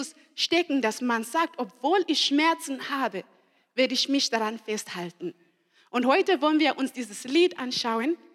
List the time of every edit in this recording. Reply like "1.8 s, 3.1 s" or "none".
none